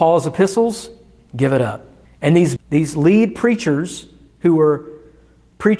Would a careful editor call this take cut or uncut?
cut